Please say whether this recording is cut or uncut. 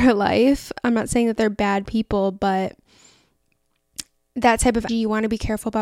cut